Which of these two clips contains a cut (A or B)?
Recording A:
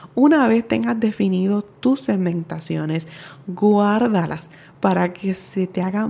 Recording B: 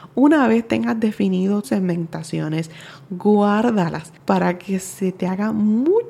B